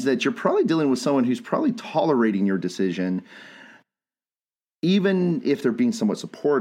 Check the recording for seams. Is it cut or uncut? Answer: uncut